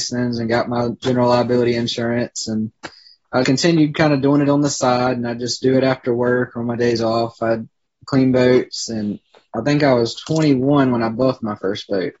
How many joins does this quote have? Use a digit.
1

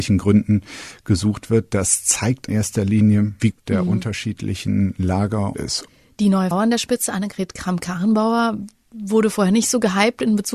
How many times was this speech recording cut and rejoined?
4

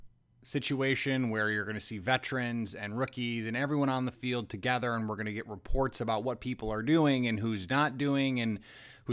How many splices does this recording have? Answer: 0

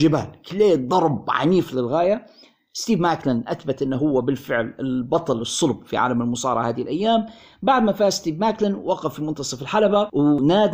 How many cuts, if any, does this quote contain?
0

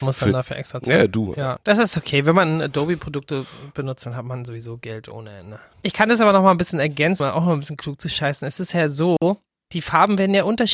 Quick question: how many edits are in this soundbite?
1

